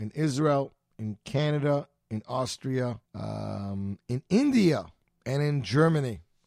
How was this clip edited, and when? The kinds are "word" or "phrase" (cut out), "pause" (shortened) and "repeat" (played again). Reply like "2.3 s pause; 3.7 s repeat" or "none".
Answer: 3.1 s pause; 5.0 s pause